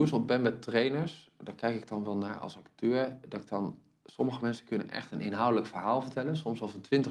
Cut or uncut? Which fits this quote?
uncut